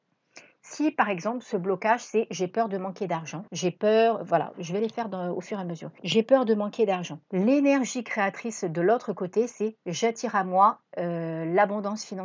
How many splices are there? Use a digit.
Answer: 3